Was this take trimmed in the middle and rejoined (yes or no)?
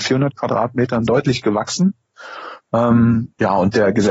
yes